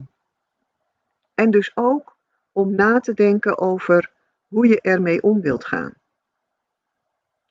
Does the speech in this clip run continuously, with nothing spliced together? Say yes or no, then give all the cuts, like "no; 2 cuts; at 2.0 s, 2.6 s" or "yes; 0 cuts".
yes; 0 cuts